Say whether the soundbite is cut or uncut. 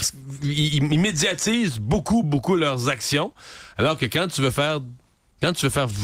cut